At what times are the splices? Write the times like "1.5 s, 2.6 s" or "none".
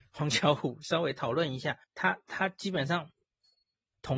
1.8 s